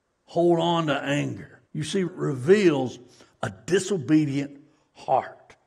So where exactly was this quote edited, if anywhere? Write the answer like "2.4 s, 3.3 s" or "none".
1.7 s, 2.1 s